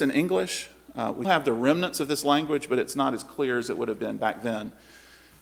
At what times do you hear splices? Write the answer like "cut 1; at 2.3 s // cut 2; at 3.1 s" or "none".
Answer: cut 1; at 1.2 s